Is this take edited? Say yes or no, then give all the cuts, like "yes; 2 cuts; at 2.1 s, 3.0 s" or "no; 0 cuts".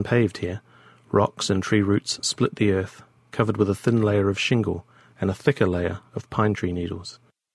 no; 0 cuts